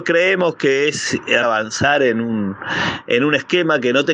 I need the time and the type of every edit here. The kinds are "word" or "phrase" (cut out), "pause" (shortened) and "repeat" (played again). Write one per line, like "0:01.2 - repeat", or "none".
0:01.4 - phrase